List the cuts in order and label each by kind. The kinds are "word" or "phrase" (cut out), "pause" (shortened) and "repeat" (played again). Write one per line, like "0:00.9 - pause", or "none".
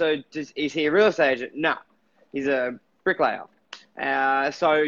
none